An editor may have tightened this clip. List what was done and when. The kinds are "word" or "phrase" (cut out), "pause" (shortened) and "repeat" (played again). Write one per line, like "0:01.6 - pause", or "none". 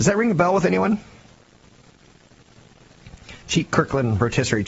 0:03.4 - pause